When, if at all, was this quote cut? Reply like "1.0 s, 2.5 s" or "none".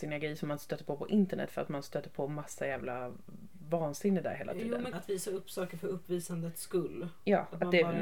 4.9 s